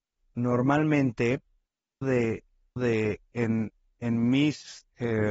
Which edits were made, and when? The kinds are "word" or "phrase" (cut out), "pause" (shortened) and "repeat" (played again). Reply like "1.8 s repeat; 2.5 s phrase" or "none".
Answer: 2.0 s word; 2.8 s word